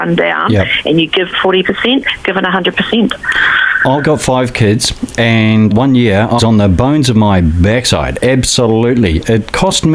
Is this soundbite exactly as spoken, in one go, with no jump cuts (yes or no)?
no